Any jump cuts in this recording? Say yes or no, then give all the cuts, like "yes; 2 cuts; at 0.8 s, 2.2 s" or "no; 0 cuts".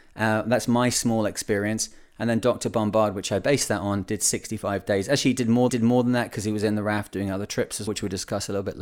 yes; 2 cuts; at 5.7 s, 7.9 s